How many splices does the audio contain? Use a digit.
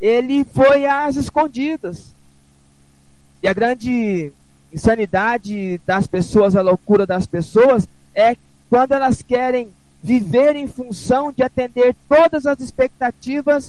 0